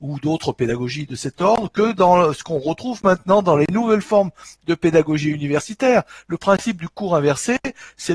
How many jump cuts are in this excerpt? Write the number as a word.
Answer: zero